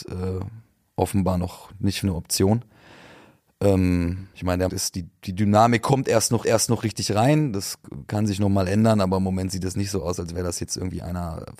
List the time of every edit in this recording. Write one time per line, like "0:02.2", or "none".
0:02.0
0:04.3
0:04.7
0:06.4